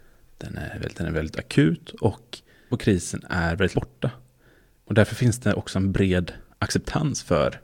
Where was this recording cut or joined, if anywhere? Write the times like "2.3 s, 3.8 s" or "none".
0.9 s, 2.7 s, 3.7 s